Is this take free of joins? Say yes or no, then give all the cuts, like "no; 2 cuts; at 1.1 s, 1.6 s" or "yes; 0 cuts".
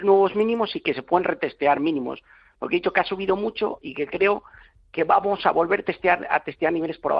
yes; 0 cuts